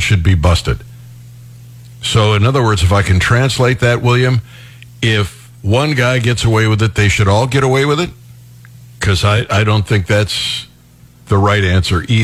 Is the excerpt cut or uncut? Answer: uncut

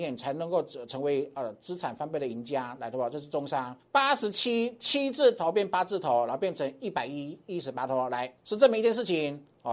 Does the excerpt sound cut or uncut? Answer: cut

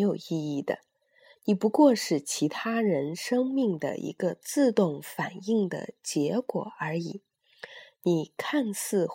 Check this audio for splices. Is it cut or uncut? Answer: uncut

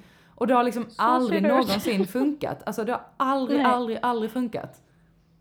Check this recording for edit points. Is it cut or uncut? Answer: uncut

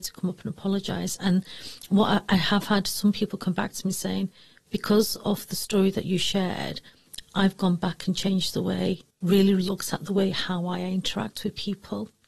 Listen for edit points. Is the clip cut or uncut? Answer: cut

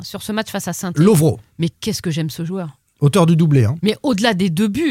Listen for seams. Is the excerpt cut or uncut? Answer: uncut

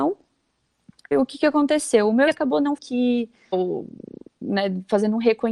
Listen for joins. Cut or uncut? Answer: cut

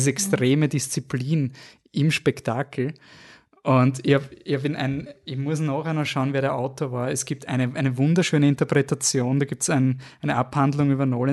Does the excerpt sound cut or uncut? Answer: uncut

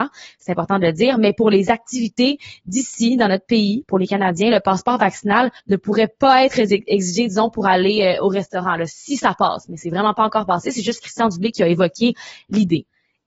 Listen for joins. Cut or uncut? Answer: cut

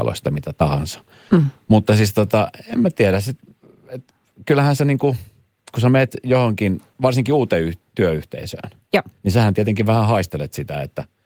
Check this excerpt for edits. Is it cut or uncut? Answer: cut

